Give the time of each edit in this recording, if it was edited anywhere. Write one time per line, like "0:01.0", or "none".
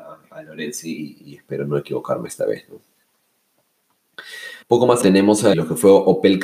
0:04.6
0:05.0
0:05.5